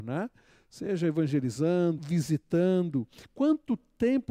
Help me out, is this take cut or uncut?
cut